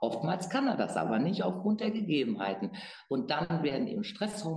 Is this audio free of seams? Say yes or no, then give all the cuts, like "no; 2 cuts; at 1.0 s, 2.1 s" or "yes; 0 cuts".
yes; 0 cuts